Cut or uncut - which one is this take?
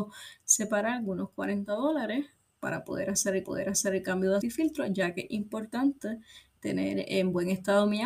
cut